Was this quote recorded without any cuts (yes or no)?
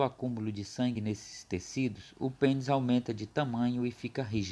yes